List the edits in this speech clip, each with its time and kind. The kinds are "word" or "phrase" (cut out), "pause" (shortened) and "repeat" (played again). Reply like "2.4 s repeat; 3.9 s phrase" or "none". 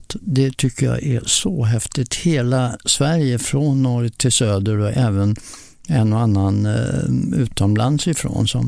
none